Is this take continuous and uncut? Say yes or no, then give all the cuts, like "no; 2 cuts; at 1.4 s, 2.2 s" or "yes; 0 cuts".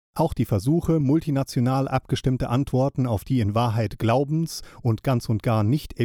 yes; 0 cuts